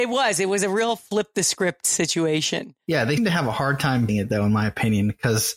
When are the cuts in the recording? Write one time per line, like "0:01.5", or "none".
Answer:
0:03.2
0:04.1